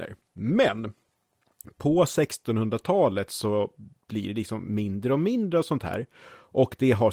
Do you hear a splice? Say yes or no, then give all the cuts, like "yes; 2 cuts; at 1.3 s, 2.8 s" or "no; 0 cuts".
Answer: no; 0 cuts